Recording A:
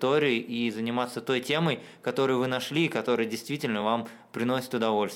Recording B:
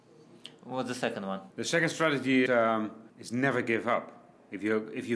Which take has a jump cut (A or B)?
B